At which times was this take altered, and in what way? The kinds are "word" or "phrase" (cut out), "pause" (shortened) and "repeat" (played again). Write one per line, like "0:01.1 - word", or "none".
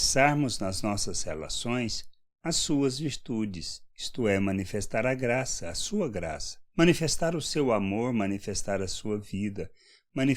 0:03.9 - pause
0:06.7 - pause